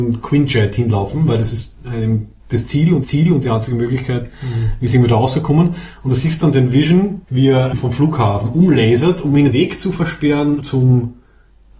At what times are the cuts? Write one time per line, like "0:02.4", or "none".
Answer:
0:02.4
0:03.0
0:07.2
0:07.7
0:09.5
0:10.6